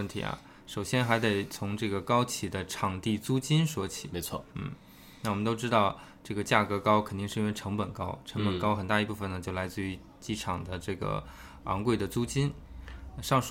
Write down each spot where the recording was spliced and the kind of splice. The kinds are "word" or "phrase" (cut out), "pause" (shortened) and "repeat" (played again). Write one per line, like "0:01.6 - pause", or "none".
0:04.5 - pause